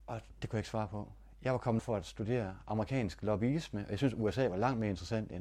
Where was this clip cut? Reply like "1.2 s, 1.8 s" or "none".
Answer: 1.8 s